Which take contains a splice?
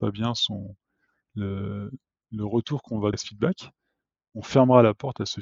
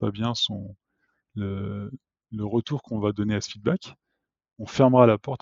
first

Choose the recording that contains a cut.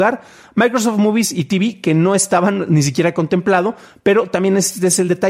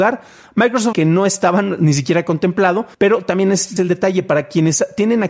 second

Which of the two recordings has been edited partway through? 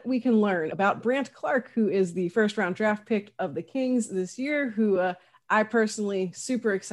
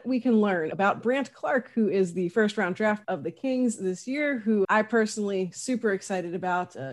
second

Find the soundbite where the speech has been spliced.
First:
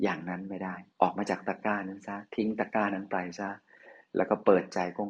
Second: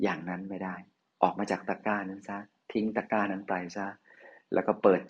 first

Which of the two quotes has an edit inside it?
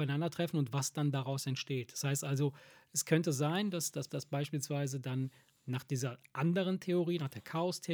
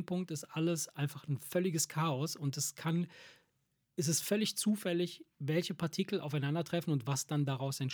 first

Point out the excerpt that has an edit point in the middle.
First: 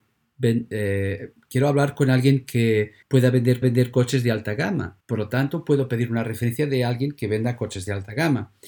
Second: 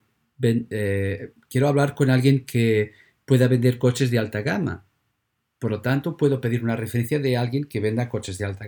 first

